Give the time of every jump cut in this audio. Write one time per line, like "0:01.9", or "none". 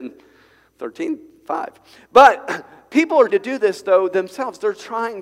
0:03.3